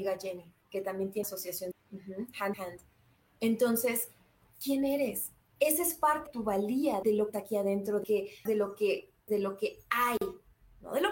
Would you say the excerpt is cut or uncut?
cut